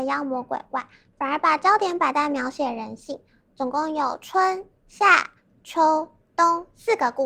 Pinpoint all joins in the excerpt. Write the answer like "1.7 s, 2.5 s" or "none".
none